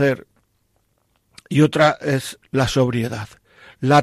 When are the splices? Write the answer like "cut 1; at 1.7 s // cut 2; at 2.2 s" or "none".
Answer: cut 1; at 2.4 s